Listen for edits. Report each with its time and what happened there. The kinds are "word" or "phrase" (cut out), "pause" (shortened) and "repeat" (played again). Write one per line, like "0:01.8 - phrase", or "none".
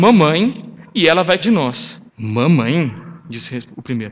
0:01.4 - word
0:02.1 - pause